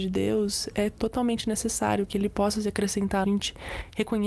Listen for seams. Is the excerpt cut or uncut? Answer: cut